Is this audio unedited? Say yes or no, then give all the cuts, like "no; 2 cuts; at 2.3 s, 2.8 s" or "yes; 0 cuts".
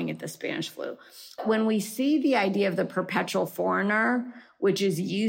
yes; 0 cuts